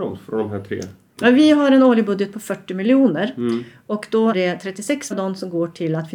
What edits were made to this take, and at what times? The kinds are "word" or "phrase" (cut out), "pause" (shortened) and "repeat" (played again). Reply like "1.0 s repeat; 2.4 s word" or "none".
4.3 s word; 5.1 s word